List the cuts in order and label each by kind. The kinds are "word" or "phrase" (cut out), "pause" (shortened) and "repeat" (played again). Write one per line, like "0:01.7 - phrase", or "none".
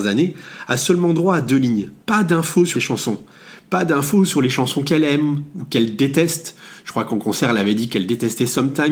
0:02.0 - pause
0:02.7 - phrase

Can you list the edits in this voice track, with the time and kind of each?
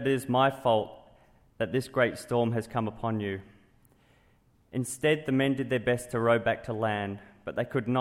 none

